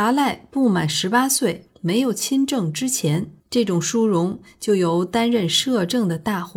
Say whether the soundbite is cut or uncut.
cut